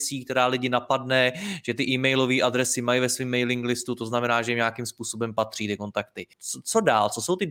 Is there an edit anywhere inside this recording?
yes; 1 cut; at 6.3 s

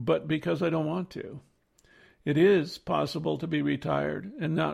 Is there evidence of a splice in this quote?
no; 0 cuts

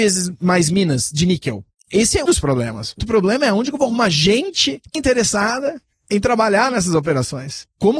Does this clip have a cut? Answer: yes; 3 cuts; at 2.2 s, 3.0 s, 4.9 s

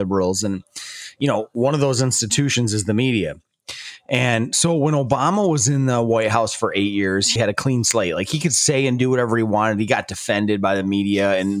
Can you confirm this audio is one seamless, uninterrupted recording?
no; 1 cut; at 7.4 s

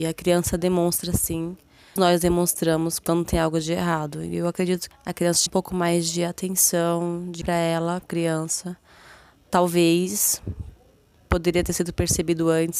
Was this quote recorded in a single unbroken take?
no; 5 cuts; at 2.0 s, 4.9 s, 5.5 s, 7.4 s, 8.0 s

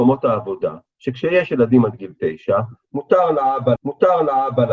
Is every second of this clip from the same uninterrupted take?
no; 1 cut; at 3.8 s

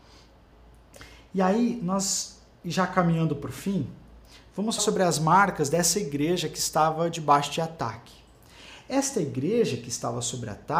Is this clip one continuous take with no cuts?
no; 1 cut; at 4.8 s

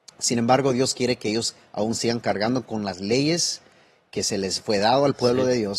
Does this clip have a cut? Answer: no; 0 cuts

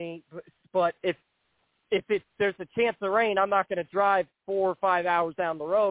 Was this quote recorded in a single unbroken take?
yes; 0 cuts

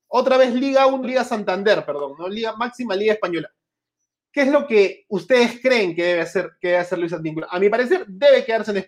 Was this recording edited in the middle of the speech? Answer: yes; 1 cut; at 1.0 s

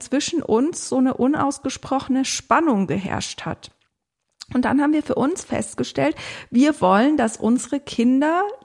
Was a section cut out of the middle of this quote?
no; 0 cuts

